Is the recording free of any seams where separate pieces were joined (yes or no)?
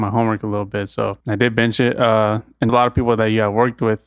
no